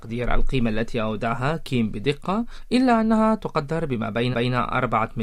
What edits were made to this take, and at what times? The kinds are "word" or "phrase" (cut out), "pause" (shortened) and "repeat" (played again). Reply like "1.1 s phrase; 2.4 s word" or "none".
4.3 s repeat